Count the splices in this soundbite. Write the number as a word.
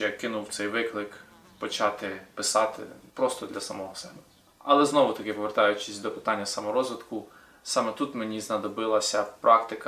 one